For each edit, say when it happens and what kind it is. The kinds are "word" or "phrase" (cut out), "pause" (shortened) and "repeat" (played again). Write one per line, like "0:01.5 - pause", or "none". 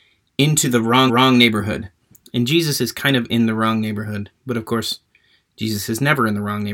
0:01.1 - repeat